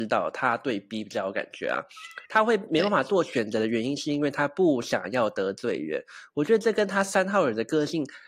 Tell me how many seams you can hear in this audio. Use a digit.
1